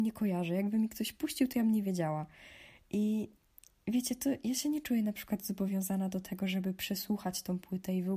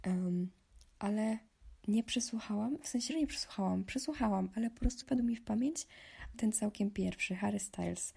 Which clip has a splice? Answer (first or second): second